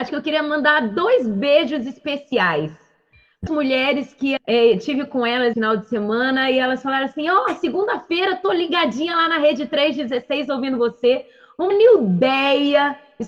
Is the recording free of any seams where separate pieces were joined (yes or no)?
no